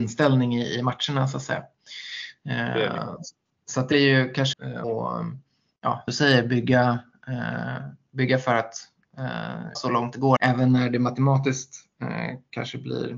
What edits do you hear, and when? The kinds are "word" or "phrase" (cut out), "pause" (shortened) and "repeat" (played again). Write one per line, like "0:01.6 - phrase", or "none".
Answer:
0:03.9 - word
0:04.5 - word
0:04.8 - word
0:06.1 - word
0:09.8 - word
0:10.4 - word